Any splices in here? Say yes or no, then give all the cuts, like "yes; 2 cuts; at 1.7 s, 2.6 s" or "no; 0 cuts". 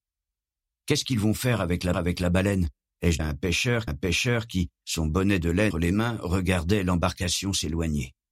yes; 4 cuts; at 1.9 s, 3.2 s, 3.9 s, 5.7 s